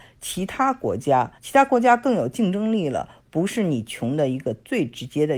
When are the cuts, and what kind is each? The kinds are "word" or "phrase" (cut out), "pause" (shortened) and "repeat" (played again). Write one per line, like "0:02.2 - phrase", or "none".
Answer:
0:01.4 - pause